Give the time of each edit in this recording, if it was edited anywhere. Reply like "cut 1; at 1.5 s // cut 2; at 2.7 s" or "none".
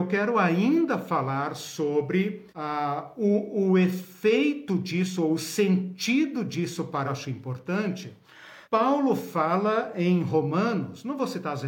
cut 1; at 2.5 s // cut 2; at 7.1 s // cut 3; at 8.6 s